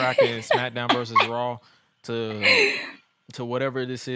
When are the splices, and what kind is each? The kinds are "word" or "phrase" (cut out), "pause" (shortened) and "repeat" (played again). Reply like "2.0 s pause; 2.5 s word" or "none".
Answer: none